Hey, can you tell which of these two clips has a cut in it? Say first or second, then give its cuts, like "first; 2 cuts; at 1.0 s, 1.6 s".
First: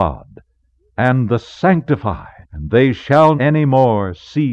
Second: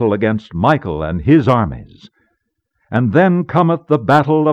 first; 2 cuts; at 2.4 s, 3.4 s